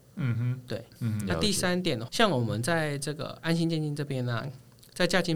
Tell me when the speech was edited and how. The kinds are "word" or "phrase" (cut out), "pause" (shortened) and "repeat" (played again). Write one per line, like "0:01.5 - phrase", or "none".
0:02.1 - phrase